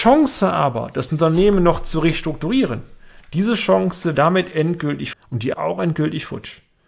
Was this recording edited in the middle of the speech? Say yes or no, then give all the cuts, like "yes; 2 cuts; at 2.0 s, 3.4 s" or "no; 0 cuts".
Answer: yes; 3 cuts; at 4.1 s, 5.1 s, 5.5 s